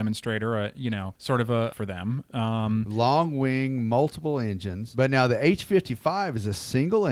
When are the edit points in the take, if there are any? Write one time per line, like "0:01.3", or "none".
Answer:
0:01.2
0:01.7

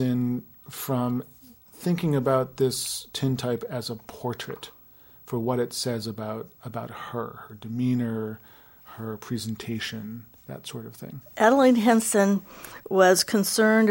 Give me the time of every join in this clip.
0:11.3

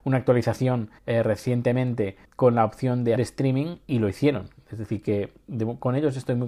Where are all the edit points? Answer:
0:01.0
0:02.3
0:03.2

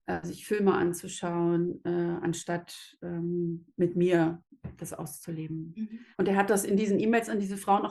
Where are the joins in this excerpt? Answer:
0:06.1

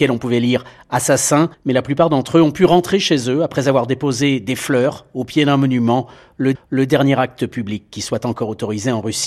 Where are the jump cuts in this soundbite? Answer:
0:01.5
0:06.5

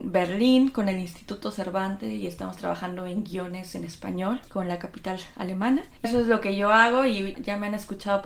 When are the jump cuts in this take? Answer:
0:06.0
0:07.3

